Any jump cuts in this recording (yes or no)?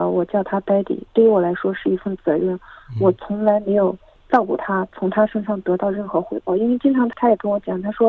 no